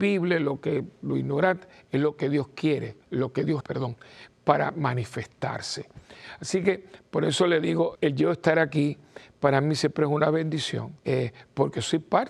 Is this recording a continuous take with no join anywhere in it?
no; 4 cuts; at 3.0 s, 3.6 s, 7.9 s, 11.0 s

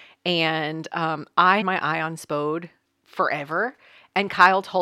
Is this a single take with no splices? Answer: no; 2 cuts; at 1.6 s, 2.9 s

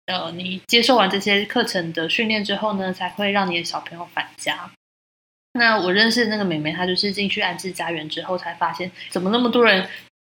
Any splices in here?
yes; 1 cut; at 9.1 s

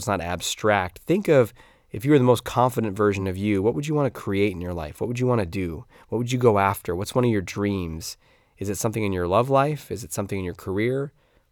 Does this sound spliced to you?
no; 0 cuts

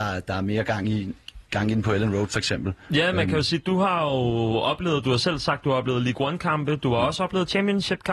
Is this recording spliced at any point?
no; 0 cuts

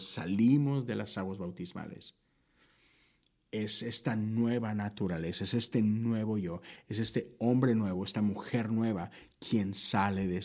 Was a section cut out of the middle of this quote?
no; 0 cuts

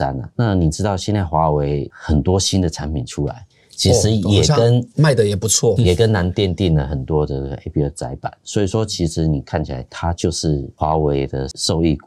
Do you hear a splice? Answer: yes; 1 cut; at 5.8 s

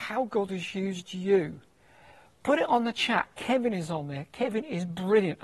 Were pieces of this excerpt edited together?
no; 0 cuts

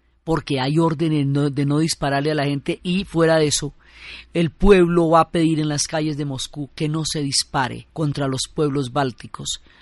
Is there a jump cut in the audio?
yes; 1 cut; at 7.9 s

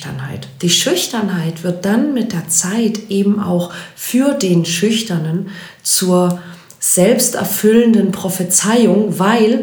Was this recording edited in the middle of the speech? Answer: no; 0 cuts

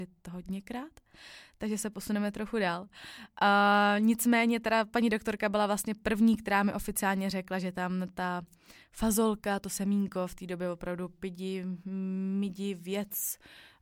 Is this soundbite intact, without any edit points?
yes; 0 cuts

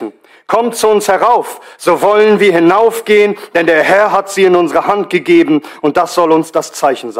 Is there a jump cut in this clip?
no; 0 cuts

